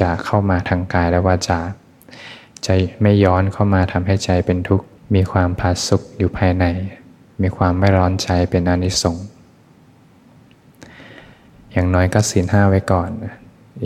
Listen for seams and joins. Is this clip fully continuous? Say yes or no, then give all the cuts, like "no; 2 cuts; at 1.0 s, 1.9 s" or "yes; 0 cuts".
no; 1 cut; at 5.0 s